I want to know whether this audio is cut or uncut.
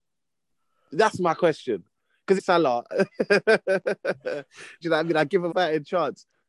cut